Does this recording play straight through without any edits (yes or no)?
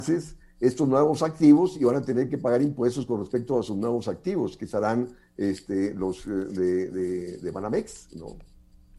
yes